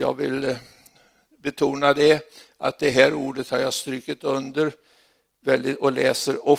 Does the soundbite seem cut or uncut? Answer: uncut